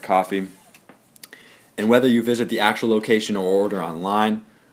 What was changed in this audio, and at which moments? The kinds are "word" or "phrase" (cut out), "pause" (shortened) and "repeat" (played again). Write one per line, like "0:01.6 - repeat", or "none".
none